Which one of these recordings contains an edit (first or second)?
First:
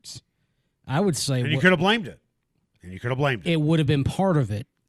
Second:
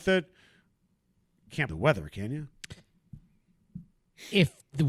second